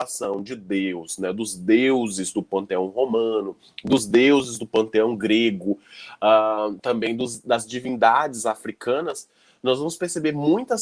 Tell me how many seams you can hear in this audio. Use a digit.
0